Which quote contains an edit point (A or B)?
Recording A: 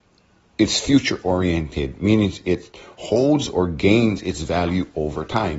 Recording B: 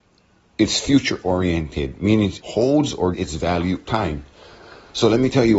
B